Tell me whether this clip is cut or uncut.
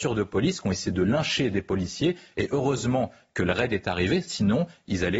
uncut